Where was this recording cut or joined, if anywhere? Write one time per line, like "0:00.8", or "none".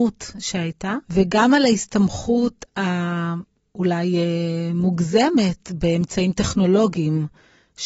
0:01.0